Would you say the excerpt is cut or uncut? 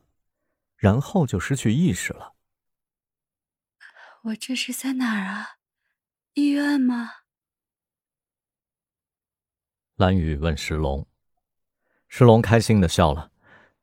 uncut